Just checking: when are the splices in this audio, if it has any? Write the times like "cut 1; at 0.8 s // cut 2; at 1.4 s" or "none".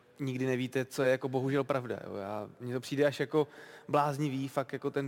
none